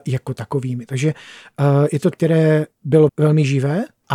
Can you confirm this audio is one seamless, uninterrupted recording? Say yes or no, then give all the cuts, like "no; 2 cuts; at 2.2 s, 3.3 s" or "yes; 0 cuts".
no; 2 cuts; at 2.1 s, 3.1 s